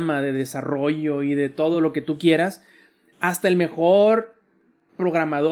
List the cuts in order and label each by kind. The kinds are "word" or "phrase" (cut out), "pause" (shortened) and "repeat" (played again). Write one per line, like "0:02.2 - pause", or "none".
none